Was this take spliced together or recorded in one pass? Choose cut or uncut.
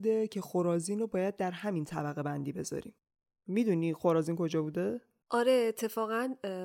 uncut